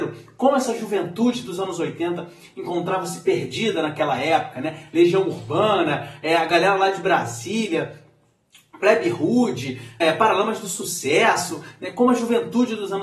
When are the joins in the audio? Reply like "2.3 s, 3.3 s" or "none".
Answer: 10.0 s